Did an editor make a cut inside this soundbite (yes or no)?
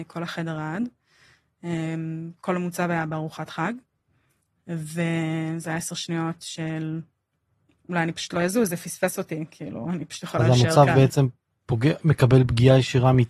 no